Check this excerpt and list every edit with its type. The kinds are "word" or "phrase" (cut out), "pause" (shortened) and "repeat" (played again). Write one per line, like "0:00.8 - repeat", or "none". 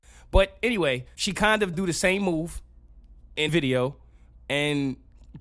0:01.1 - word
0:01.7 - word
0:03.5 - word